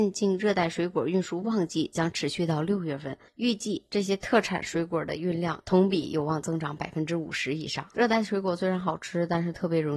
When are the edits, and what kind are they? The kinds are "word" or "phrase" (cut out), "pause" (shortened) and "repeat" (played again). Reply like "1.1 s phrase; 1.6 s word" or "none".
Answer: 3.3 s pause